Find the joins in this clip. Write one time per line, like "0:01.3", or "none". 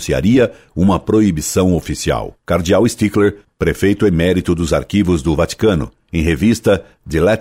0:02.4